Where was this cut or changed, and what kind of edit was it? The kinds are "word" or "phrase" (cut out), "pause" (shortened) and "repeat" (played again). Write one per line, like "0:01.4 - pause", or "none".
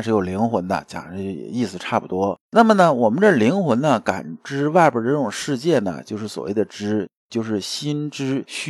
0:02.4 - pause
0:07.2 - pause